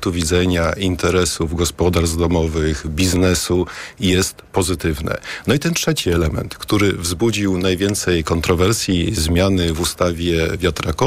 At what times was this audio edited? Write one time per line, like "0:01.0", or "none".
none